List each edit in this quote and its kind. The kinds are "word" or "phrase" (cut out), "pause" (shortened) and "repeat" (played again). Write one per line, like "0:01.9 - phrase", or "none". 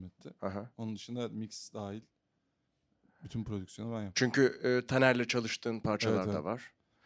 none